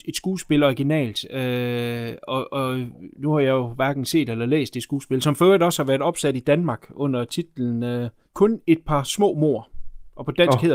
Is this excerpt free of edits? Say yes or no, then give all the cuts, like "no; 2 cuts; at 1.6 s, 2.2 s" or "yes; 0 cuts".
yes; 0 cuts